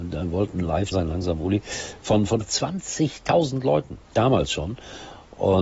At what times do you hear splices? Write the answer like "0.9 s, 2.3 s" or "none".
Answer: 0.9 s, 2.4 s, 4.0 s